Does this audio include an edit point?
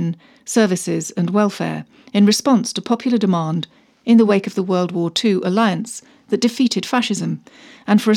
no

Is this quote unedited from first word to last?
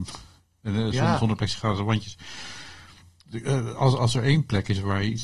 yes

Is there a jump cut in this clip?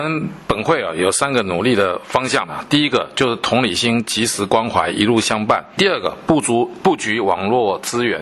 yes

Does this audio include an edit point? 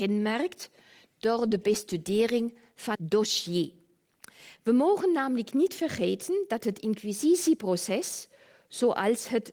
yes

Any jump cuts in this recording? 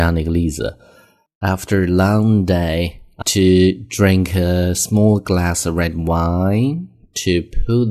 yes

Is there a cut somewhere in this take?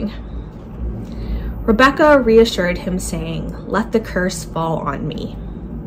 no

